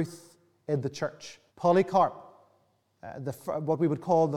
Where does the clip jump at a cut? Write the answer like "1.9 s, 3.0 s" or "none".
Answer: 1.5 s